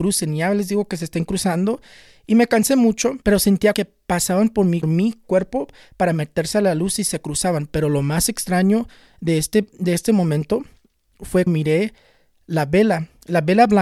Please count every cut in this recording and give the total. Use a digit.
4